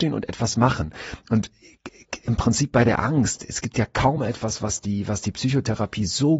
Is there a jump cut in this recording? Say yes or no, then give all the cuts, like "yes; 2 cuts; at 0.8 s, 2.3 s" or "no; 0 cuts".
no; 0 cuts